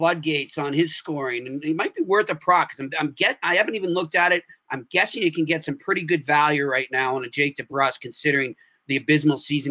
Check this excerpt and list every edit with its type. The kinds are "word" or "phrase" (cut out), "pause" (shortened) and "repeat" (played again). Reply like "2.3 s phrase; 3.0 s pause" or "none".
none